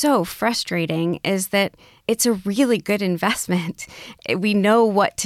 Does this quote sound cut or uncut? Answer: uncut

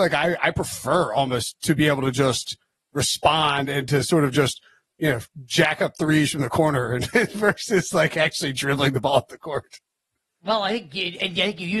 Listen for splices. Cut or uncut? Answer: uncut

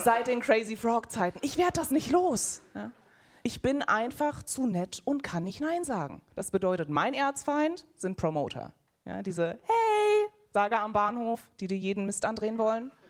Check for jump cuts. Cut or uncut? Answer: cut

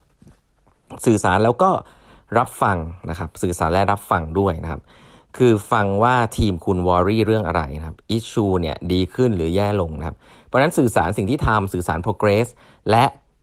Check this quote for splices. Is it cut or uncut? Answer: uncut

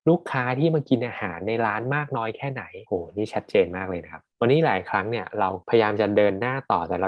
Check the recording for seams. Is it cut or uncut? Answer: cut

